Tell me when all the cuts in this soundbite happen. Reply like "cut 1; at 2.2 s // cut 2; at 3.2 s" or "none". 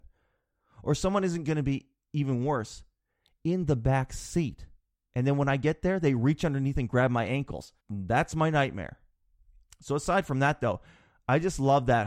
cut 1; at 7.8 s